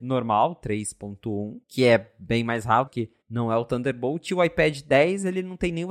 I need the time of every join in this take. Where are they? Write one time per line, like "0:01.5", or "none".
0:01.6
0:02.9
0:03.2